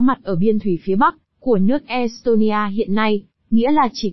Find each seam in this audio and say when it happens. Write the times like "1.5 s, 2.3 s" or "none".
none